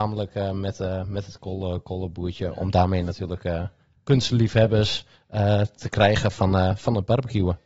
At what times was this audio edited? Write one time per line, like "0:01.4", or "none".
none